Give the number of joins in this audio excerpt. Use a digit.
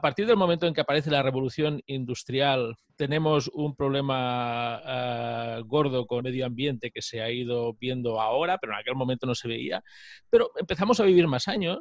2